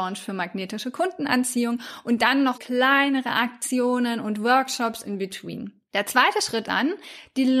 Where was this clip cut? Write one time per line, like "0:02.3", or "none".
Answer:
0:02.5
0:06.6